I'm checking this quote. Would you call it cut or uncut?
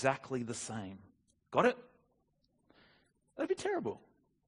uncut